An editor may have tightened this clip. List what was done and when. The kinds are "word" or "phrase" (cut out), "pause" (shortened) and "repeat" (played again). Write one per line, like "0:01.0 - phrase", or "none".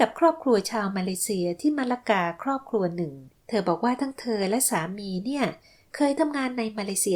none

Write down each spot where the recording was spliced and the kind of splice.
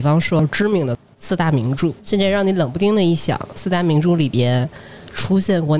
0:02.0 - pause

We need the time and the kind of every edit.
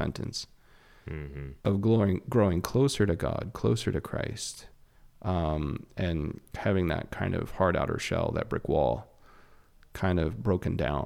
none

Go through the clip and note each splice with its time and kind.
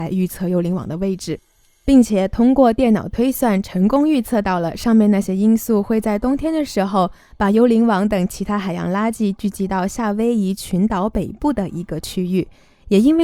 none

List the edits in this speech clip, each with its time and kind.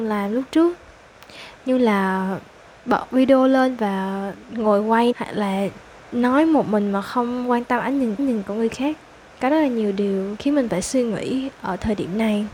0:05.1 - word
0:08.2 - repeat

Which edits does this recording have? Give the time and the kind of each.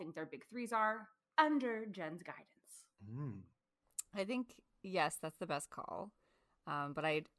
none

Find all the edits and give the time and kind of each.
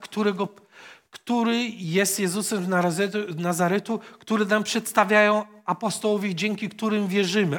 none

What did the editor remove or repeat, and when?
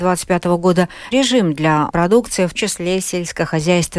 0:01.1 - word
0:01.9 - word
0:02.5 - word

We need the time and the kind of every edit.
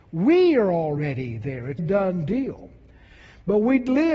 0:01.8 - phrase

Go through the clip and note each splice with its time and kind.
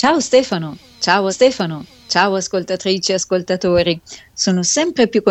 0:01.3 - repeat

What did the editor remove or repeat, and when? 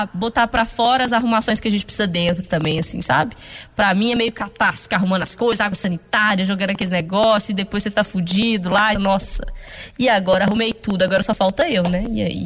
0:08.9 - phrase

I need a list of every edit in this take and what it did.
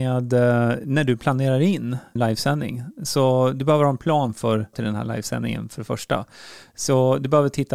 0:02.2 - word
0:04.7 - phrase

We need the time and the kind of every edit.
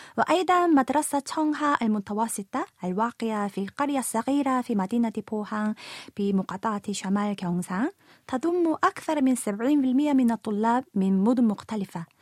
none

